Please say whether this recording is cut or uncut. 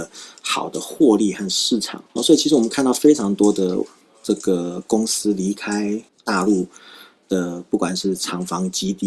cut